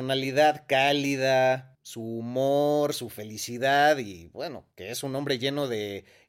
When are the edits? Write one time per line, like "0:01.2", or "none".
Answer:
0:01.7